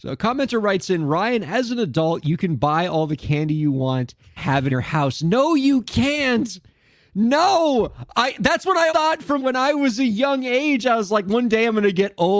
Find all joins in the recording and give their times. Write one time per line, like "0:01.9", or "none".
0:04.4
0:04.7
0:08.9
0:09.4